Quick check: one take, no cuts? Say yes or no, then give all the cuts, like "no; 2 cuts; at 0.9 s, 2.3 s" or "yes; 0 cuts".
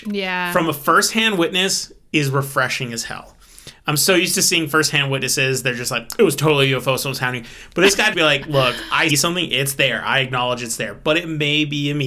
no; 2 cuts; at 8.1 s, 9.1 s